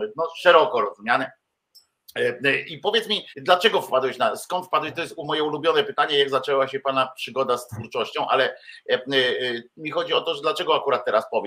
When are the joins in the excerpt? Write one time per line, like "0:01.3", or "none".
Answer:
0:03.3